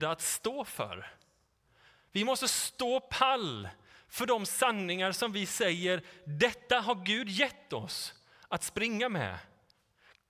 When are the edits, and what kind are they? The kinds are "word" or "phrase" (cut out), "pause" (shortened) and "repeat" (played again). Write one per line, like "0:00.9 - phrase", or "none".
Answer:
none